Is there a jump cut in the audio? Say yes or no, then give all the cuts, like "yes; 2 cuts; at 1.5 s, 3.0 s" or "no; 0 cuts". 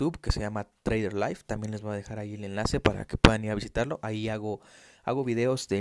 no; 0 cuts